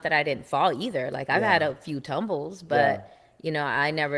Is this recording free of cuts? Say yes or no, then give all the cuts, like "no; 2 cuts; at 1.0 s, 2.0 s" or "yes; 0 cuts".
yes; 0 cuts